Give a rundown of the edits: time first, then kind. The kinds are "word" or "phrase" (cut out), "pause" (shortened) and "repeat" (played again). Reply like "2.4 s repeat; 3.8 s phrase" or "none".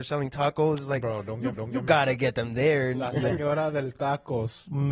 1.5 s repeat